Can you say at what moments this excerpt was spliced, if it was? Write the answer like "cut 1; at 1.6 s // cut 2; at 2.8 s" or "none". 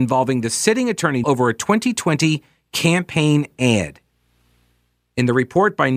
cut 1; at 1.2 s